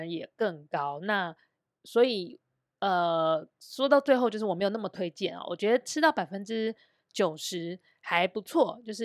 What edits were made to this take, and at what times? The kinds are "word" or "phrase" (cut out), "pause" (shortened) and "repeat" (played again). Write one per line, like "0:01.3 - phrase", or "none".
none